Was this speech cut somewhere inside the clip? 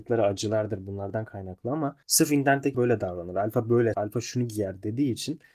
yes; 3 cuts; at 2.0 s, 2.7 s, 3.9 s

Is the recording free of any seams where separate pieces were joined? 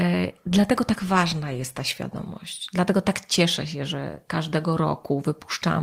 yes; 0 cuts

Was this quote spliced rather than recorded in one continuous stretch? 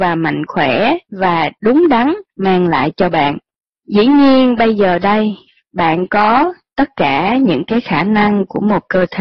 yes; 3 cuts; at 1.5 s, 2.3 s, 3.6 s

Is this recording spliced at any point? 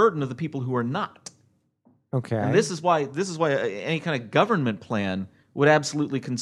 no; 0 cuts

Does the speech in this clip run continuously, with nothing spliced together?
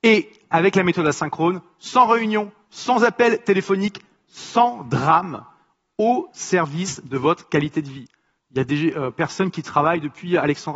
yes; 0 cuts

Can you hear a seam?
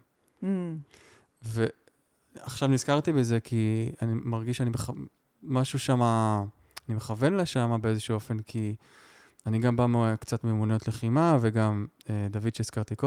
no; 0 cuts

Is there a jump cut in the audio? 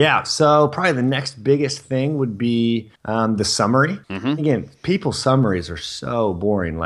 yes; 2 cuts; at 3.0 s, 4.0 s

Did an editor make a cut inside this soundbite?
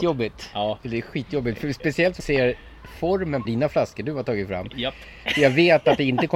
yes; 2 cuts; at 2.2 s, 3.4 s

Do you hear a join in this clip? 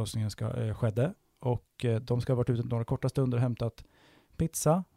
no; 0 cuts

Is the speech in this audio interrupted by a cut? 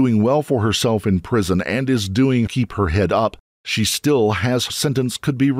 yes; 2 cuts; at 2.5 s, 4.7 s

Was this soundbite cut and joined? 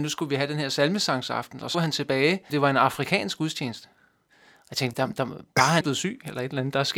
yes; 4 cuts; at 1.7 s, 2.5 s, 4.9 s, 5.8 s

